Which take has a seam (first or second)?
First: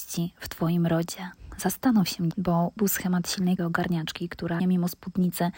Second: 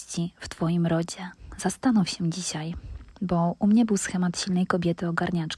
first